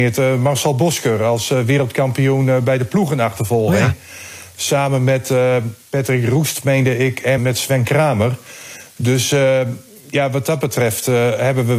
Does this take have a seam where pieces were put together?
yes; 1 cut; at 7.4 s

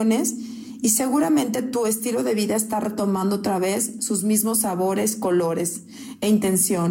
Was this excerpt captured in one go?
yes; 0 cuts

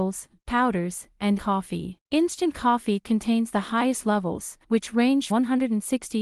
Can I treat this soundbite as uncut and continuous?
no; 4 cuts; at 1.4 s, 2.0 s, 4.6 s, 5.3 s

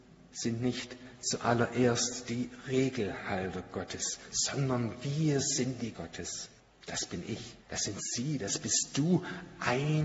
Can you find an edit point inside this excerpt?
yes; 3 cuts; at 5.9 s, 6.6 s, 7.6 s

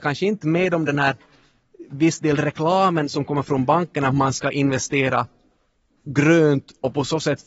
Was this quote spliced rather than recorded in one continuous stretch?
no; 0 cuts

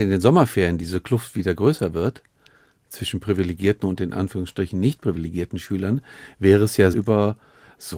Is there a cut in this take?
yes; 1 cut; at 6.9 s

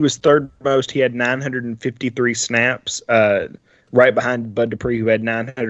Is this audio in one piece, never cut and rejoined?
yes; 0 cuts

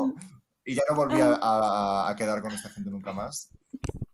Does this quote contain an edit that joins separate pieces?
no; 0 cuts

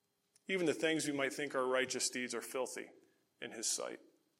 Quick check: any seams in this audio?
no; 0 cuts

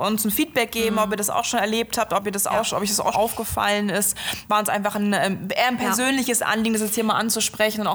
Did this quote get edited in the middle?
yes; 1 cut; at 3.1 s

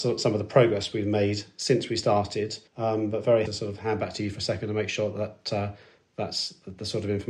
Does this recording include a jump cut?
yes; 2 cuts; at 2.7 s, 3.5 s

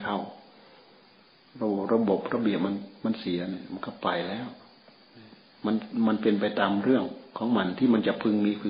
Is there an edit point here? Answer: no; 0 cuts

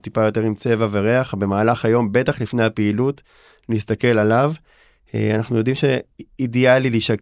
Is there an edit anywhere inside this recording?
no; 0 cuts

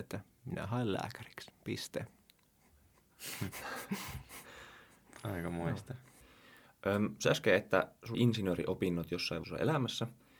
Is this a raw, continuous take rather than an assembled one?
no; 3 cuts; at 7.2 s, 8.1 s, 9.4 s

